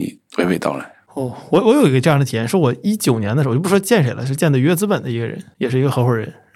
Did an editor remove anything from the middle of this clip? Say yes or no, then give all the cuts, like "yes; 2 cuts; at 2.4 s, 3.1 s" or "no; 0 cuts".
no; 0 cuts